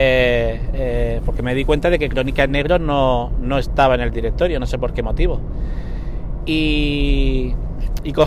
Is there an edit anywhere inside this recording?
no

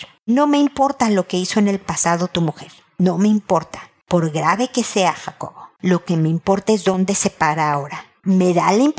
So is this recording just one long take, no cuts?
yes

